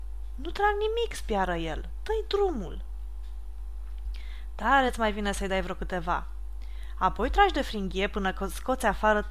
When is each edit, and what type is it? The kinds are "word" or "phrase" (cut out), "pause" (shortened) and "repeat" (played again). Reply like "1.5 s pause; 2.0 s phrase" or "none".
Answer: none